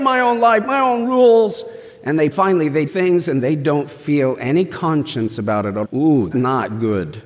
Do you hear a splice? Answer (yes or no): yes